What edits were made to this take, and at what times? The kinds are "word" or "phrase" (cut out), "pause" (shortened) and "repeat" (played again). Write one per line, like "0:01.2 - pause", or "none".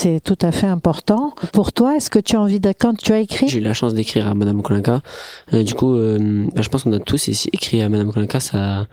0:03.0 - word
0:03.5 - phrase